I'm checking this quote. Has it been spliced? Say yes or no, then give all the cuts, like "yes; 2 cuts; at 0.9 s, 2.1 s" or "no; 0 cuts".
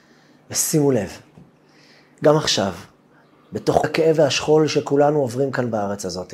yes; 1 cut; at 3.8 s